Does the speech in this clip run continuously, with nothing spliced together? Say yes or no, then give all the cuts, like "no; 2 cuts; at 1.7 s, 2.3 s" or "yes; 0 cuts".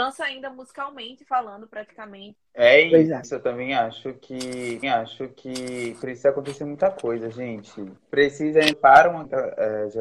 no; 2 cuts; at 4.8 s, 8.7 s